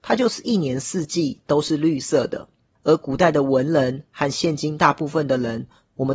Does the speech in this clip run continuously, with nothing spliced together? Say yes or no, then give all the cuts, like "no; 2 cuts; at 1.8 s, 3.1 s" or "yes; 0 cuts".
yes; 0 cuts